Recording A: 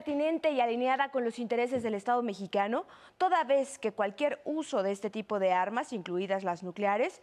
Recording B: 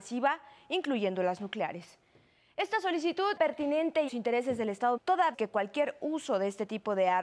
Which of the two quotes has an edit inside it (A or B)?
B